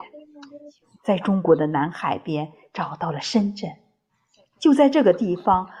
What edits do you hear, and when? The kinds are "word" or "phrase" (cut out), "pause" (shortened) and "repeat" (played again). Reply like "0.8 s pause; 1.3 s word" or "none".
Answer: none